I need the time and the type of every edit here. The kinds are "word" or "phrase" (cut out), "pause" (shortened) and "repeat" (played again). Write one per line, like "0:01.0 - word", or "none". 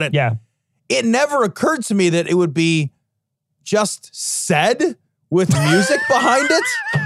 none